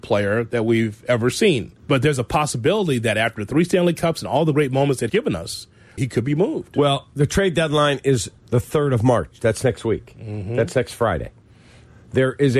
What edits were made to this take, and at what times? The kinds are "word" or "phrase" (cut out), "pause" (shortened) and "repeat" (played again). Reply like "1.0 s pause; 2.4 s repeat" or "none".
1.8 s pause; 5.1 s word; 6.0 s phrase; 8.4 s pause